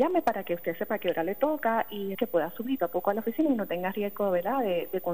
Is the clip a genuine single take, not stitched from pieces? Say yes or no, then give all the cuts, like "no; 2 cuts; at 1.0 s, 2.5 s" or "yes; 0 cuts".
no; 2 cuts; at 2.1 s, 2.8 s